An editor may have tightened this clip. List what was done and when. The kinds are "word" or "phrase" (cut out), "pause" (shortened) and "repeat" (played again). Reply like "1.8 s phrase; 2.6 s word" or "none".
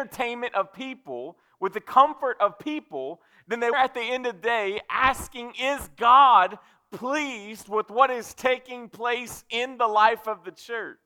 3.7 s word

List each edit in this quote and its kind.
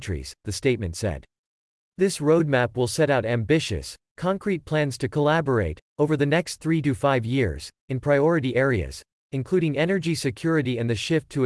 none

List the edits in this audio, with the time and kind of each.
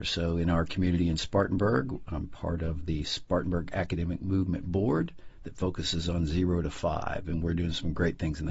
none

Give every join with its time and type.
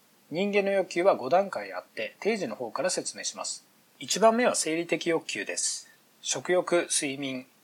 none

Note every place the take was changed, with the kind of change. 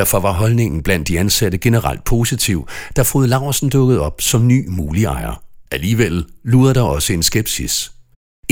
5.7 s pause

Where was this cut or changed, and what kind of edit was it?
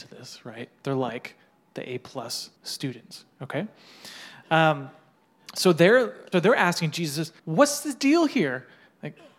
2.6 s pause; 6.3 s word; 7.4 s pause

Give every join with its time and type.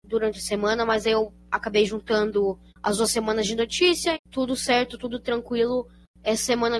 2.7 s pause; 4.1 s word

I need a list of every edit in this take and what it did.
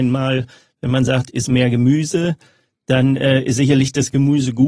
none

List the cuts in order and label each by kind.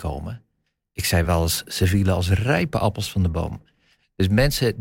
none

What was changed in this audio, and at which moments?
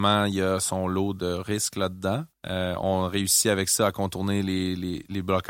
2.3 s pause

